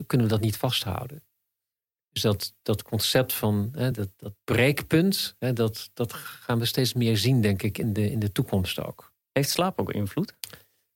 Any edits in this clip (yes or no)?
no